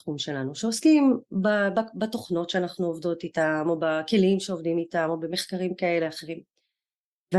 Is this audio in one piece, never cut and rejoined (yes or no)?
yes